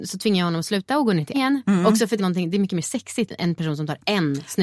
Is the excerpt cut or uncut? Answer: cut